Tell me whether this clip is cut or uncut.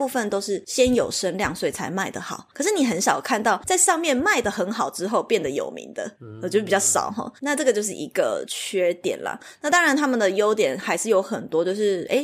cut